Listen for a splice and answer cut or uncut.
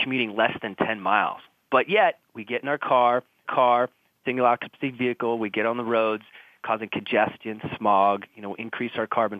cut